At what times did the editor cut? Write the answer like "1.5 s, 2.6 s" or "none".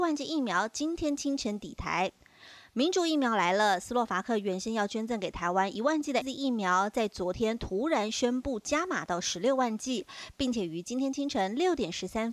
6.2 s